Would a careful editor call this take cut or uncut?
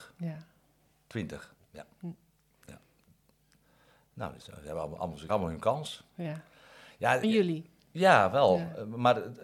cut